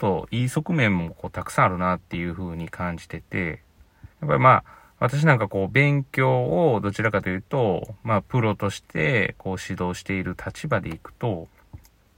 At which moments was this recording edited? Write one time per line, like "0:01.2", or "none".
0:04.1